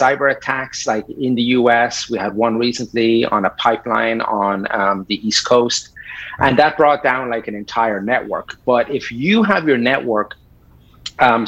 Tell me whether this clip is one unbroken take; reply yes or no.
yes